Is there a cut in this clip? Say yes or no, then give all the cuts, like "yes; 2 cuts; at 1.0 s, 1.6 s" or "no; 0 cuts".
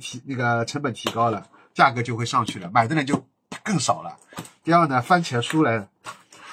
no; 0 cuts